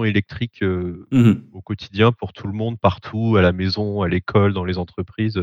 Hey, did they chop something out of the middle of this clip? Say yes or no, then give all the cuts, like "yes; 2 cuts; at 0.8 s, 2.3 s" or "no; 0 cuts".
no; 0 cuts